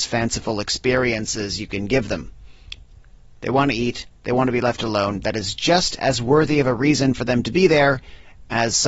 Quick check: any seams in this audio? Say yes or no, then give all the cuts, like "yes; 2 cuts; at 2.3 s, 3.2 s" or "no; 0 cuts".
no; 0 cuts